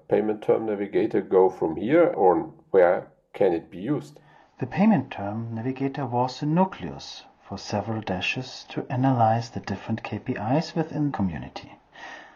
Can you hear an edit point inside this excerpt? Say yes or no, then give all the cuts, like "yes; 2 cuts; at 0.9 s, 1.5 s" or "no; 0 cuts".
yes; 1 cut; at 11.1 s